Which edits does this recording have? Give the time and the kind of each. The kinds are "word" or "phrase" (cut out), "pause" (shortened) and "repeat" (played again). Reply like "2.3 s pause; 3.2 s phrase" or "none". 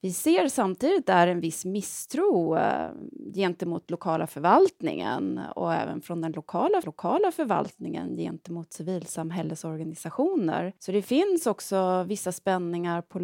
6.8 s repeat; 10.8 s pause